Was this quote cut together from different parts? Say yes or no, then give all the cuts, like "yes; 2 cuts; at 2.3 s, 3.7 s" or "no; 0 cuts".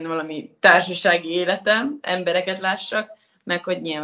no; 0 cuts